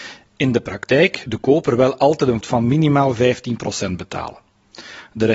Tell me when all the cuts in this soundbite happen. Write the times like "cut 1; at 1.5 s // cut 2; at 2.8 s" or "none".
cut 1; at 1.3 s // cut 2; at 2.4 s

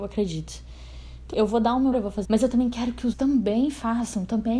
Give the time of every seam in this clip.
cut 1; at 1.3 s // cut 2; at 1.9 s // cut 3; at 2.2 s // cut 4; at 3.1 s

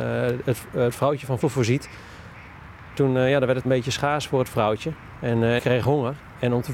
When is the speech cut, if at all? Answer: cut 1; at 1.4 s // cut 2; at 3.6 s // cut 3; at 5.6 s

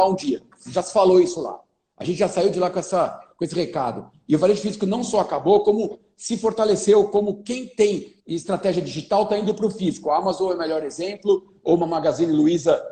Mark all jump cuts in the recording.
cut 1; at 8.2 s

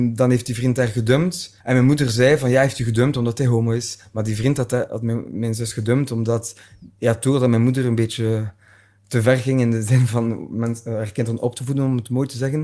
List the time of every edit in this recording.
cut 1; at 1.6 s

